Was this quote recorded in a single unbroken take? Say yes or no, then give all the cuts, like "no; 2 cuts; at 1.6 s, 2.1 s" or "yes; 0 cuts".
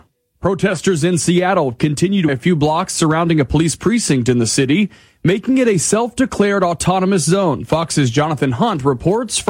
no; 1 cut; at 2.3 s